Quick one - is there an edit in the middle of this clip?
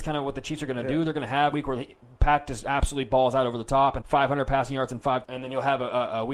yes; 3 cuts; at 1.5 s, 4.0 s, 5.2 s

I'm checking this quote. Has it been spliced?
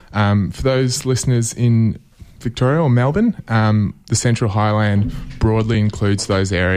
no; 0 cuts

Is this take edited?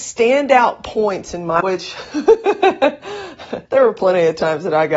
yes; 2 cuts; at 1.6 s, 3.6 s

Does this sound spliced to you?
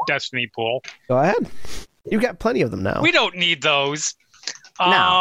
no; 0 cuts

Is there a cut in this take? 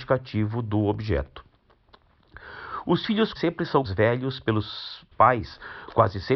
yes; 3 cuts; at 3.3 s, 3.8 s, 5.1 s

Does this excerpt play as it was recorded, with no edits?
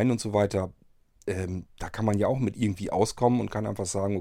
yes; 0 cuts

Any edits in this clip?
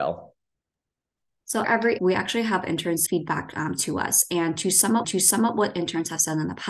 yes; 4 cuts; at 1.6 s, 2.0 s, 3.1 s, 5.0 s

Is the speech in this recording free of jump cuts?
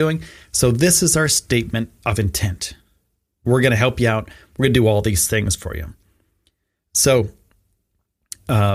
yes; 0 cuts

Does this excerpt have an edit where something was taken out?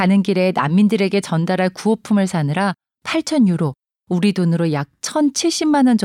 no; 0 cuts

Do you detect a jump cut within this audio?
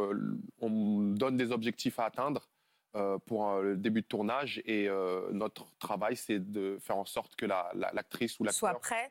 no; 0 cuts

